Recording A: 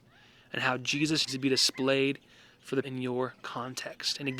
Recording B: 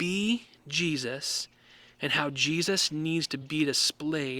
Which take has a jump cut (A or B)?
A